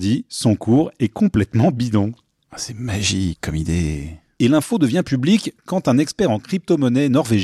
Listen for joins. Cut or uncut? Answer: uncut